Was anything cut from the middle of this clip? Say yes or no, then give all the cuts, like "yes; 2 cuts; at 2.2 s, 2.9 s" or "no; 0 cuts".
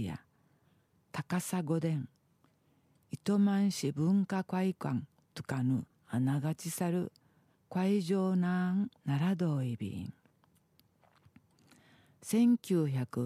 yes; 1 cut; at 5.9 s